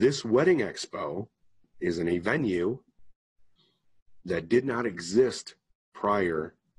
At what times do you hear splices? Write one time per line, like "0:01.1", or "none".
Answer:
none